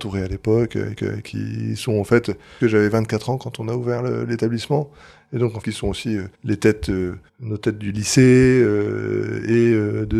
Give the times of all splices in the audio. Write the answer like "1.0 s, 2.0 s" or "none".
1.0 s, 2.6 s, 5.6 s, 6.3 s, 7.3 s